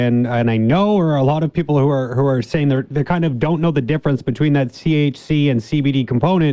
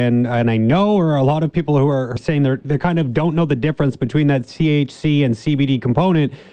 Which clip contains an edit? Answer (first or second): second